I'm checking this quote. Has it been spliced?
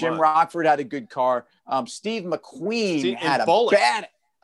no; 0 cuts

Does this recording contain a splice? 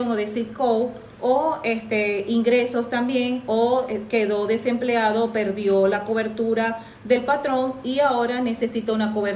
no; 0 cuts

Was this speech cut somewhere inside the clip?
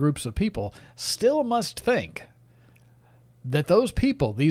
no; 0 cuts

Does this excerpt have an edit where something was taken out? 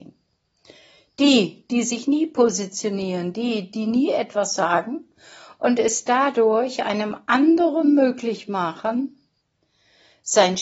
no; 0 cuts

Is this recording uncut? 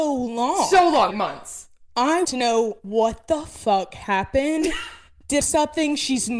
no; 3 cuts; at 1.1 s, 2.2 s, 5.4 s

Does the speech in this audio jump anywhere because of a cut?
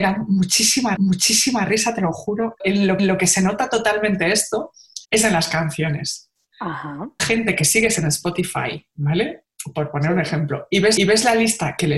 yes; 6 cuts; at 1.0 s, 2.6 s, 3.0 s, 5.0 s, 7.2 s, 11.0 s

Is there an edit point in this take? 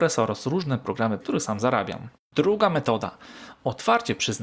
yes; 2 cuts; at 1.2 s, 2.1 s

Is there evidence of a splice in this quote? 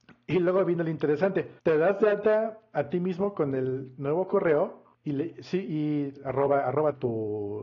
yes; 2 cuts; at 1.6 s, 4.9 s

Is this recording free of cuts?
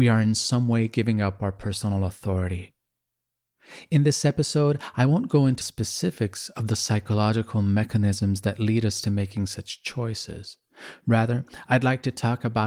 no; 1 cut; at 5.6 s

